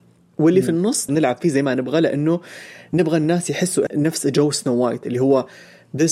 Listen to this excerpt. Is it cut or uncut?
cut